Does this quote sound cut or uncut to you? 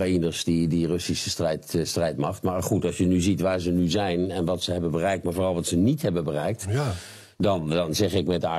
uncut